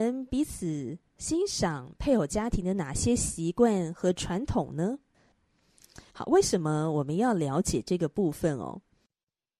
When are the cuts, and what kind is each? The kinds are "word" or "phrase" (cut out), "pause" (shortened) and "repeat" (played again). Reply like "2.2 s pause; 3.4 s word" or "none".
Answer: 6.1 s pause